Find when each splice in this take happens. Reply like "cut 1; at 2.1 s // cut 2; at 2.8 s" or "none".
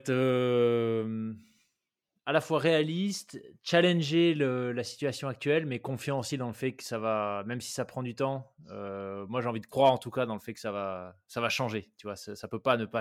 none